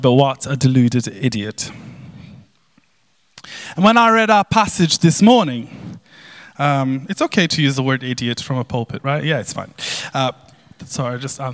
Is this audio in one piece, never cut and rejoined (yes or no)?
yes